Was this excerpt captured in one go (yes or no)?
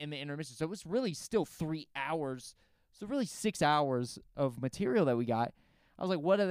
yes